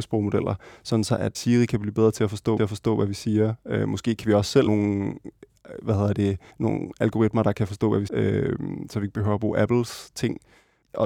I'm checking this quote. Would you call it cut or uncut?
cut